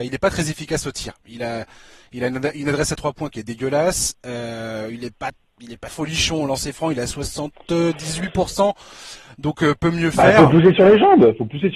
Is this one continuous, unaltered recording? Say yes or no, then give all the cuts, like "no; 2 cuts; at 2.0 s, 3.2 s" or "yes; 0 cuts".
no; 1 cut; at 5.9 s